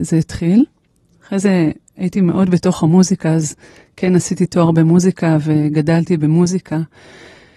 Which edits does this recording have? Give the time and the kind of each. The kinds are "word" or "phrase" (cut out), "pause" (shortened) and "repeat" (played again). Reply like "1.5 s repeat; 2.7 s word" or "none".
none

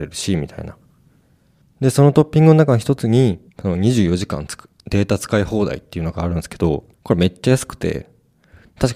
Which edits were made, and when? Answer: 3.5 s pause; 6.9 s pause

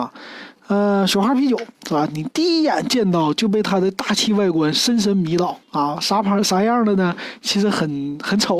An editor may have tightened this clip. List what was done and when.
1.7 s pause; 5.6 s pause

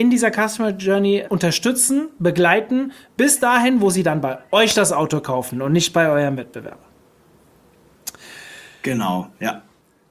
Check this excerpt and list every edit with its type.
1.2 s word

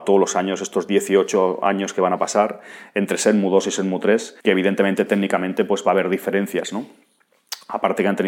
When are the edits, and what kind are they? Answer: 4.4 s pause

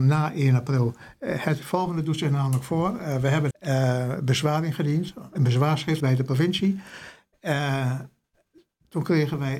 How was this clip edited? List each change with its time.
3.5 s phrase; 5.3 s word; 6.0 s word

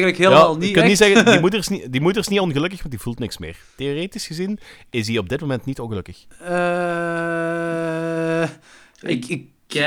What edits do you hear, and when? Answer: none

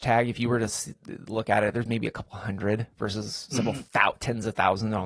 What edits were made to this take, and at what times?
none

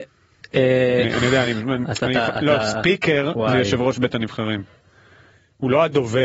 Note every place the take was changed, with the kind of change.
none

